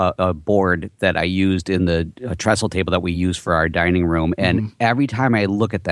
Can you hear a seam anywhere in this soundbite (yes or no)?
no